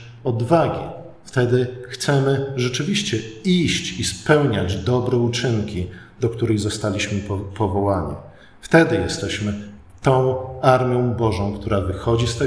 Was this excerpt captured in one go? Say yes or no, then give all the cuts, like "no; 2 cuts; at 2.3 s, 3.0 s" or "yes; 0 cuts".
yes; 0 cuts